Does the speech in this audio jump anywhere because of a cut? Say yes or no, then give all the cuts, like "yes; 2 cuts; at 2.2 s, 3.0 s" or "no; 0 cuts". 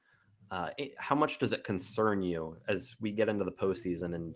yes; 1 cut; at 0.9 s